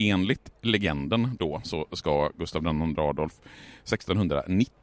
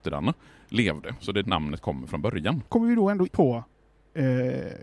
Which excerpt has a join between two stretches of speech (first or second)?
second